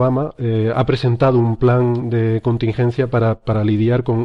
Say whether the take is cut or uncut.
uncut